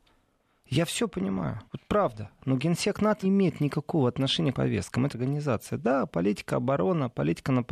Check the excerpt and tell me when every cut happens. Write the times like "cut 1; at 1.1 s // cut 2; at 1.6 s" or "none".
cut 1; at 1.7 s // cut 2; at 3.2 s // cut 3; at 4.5 s // cut 4; at 5.1 s

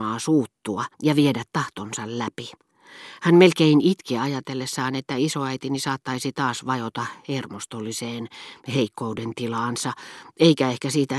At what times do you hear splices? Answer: cut 1; at 0.9 s

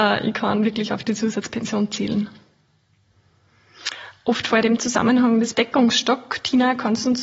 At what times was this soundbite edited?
cut 1; at 4.6 s // cut 2; at 5.5 s

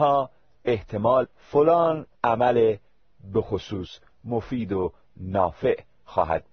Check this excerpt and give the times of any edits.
cut 1; at 1.2 s // cut 2; at 2.1 s

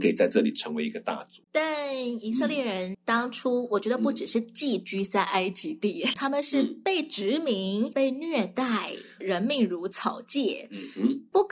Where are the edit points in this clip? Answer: cut 1; at 1.4 s // cut 2; at 2.9 s // cut 3; at 6.1 s

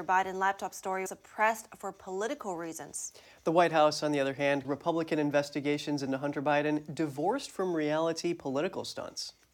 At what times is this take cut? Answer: cut 1; at 1.1 s // cut 2; at 4.6 s

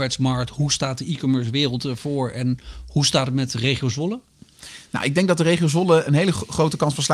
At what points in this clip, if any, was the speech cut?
cut 1; at 6.1 s

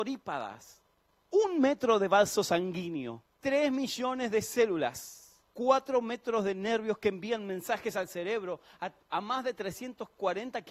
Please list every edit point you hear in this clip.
cut 1; at 3.3 s // cut 2; at 5.5 s

